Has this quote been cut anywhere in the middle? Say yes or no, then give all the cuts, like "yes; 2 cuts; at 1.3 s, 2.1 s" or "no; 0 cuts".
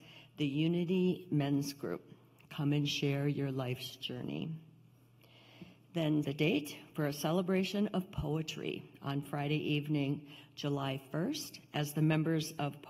yes; 1 cut; at 6.2 s